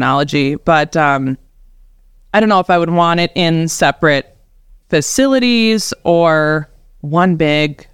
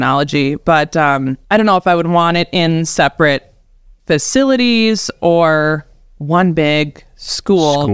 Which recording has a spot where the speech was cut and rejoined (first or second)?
second